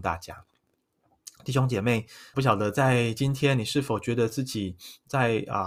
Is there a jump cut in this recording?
yes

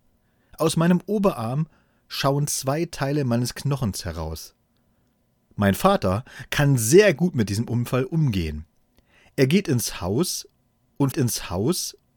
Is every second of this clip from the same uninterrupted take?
no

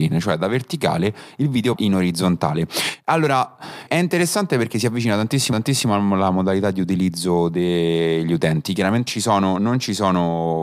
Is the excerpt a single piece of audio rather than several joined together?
no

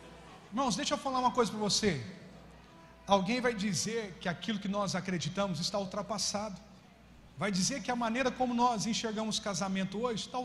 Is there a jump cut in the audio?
yes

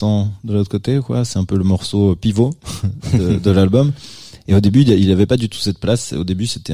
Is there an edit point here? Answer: no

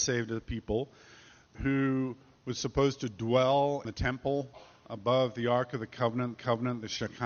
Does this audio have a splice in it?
yes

